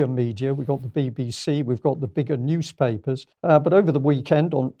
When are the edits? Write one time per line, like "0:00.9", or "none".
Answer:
0:03.3